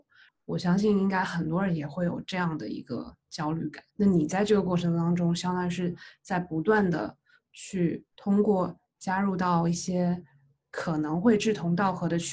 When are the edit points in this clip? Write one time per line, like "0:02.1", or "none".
0:03.9
0:08.1

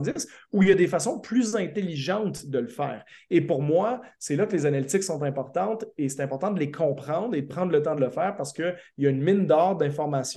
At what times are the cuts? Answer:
none

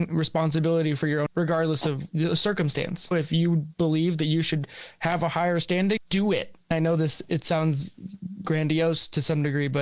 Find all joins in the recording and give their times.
0:01.3
0:02.1
0:06.0

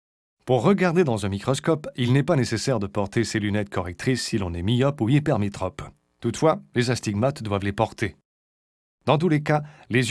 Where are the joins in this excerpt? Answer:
none

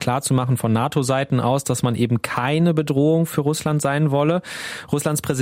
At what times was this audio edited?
none

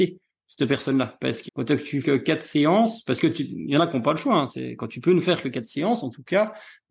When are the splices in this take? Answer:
0:01.5
0:02.0

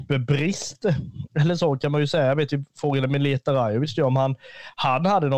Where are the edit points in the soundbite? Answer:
none

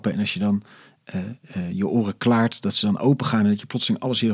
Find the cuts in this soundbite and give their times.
none

